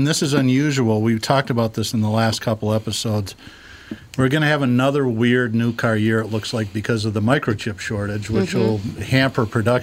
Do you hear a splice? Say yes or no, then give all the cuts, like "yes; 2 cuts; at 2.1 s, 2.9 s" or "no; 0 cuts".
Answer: no; 0 cuts